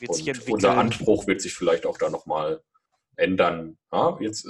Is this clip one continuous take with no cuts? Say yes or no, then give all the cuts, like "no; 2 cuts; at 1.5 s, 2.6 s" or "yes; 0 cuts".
yes; 0 cuts